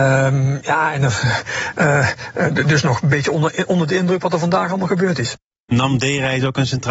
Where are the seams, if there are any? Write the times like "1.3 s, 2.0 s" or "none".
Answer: none